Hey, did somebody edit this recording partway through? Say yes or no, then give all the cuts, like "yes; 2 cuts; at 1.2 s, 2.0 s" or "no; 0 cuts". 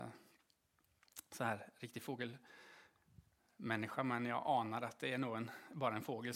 no; 0 cuts